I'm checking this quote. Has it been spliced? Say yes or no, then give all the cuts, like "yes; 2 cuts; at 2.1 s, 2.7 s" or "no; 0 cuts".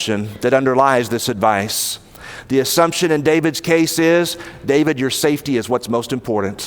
no; 0 cuts